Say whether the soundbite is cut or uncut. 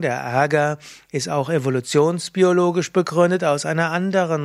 uncut